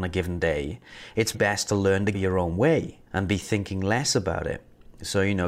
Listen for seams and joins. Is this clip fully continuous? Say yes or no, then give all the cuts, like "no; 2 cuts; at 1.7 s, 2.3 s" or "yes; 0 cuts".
no; 3 cuts; at 1.3 s, 2.1 s, 3.1 s